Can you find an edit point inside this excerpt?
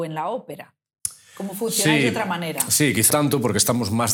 yes; 1 cut; at 3.1 s

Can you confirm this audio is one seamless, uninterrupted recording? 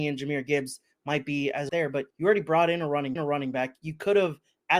no; 3 cuts; at 1.7 s, 2.1 s, 3.2 s

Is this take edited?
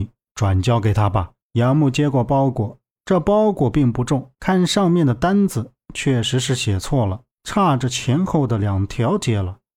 yes; 3 cuts; at 1.4 s, 4.3 s, 7.3 s

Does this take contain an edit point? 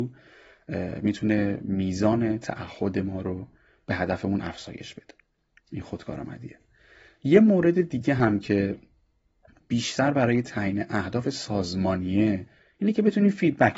no; 0 cuts

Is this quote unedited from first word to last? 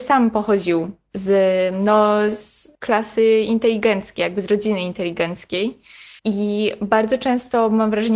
no; 2 cuts; at 2.7 s, 6.2 s

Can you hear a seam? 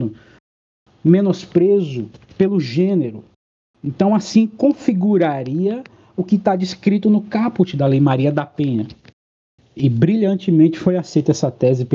no; 0 cuts

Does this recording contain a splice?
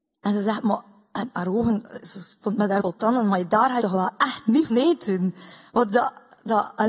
yes; 4 cuts; at 2.8 s, 3.8 s, 4.7 s, 5.9 s

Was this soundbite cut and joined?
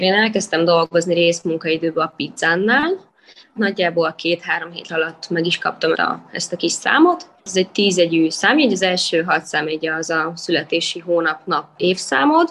yes; 4 cuts; at 3.6 s, 4.9 s, 5.9 s, 7.4 s

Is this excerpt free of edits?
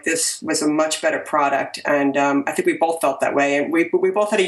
yes; 0 cuts

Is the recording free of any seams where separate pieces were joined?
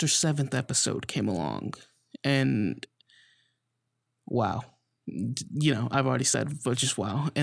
yes; 0 cuts

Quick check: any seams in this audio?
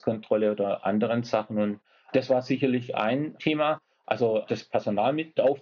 no; 0 cuts

